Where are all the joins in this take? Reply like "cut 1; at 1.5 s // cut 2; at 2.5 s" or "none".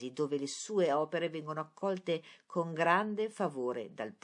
none